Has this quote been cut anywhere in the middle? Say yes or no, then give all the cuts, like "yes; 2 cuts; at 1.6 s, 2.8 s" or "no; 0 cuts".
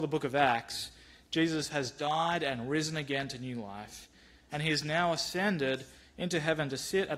no; 0 cuts